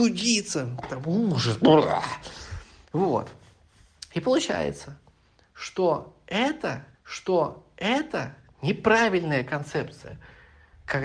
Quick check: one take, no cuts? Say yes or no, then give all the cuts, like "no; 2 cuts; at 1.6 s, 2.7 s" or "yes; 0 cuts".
no; 1 cut; at 6.9 s